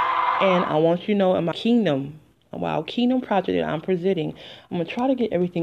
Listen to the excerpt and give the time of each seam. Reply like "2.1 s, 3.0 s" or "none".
1.5 s